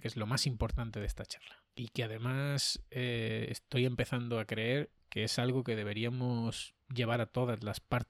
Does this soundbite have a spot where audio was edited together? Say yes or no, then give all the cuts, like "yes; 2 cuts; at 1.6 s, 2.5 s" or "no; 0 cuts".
yes; 1 cut; at 1.7 s